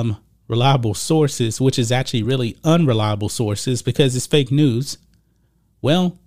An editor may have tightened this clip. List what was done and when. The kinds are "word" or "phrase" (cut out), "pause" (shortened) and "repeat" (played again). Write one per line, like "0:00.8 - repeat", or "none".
none